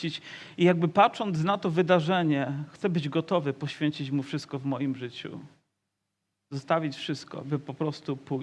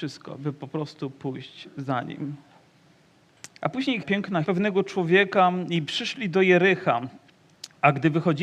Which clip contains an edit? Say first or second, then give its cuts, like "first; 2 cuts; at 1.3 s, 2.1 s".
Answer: second; 2 cuts; at 4.0 s, 4.4 s